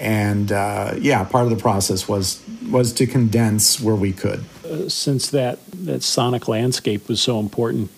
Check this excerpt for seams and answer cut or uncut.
uncut